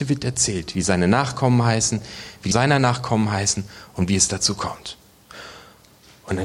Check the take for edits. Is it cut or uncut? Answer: cut